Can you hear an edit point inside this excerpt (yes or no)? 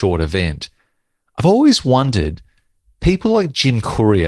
no